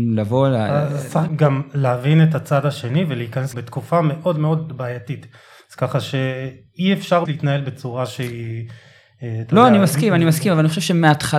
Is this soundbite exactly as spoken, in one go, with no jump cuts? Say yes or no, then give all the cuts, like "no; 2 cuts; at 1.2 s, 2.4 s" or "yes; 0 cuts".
no; 3 cuts; at 1.3 s, 3.5 s, 7.3 s